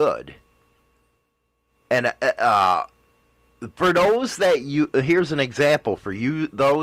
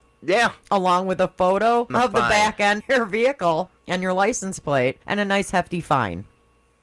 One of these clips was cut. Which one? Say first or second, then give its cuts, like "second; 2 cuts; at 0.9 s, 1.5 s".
second; 4 cuts; at 1.9 s, 2.8 s, 3.8 s, 5.0 s